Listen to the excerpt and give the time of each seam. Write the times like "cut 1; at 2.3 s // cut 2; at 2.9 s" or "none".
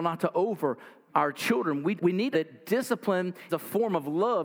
cut 1; at 1.1 s // cut 2; at 2.0 s // cut 3; at 2.3 s // cut 4; at 3.5 s